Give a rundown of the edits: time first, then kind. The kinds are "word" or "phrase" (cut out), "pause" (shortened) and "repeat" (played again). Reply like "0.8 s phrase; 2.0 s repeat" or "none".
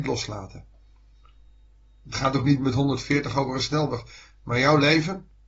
none